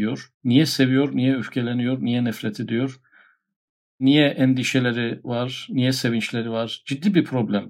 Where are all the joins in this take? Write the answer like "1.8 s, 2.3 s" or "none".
none